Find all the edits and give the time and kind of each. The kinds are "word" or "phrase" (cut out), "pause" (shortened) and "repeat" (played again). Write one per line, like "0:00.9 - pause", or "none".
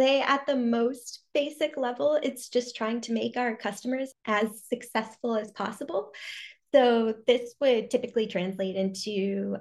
none